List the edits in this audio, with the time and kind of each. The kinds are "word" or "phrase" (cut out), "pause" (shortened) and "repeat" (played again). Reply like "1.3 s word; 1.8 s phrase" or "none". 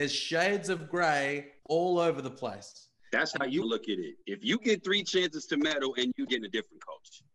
1.6 s pause; 3.6 s word; 6.3 s phrase